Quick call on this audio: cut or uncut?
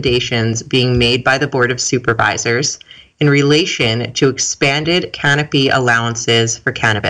uncut